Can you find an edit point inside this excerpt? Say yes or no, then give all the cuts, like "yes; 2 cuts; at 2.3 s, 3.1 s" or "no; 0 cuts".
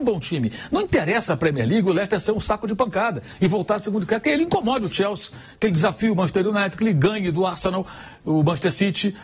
no; 0 cuts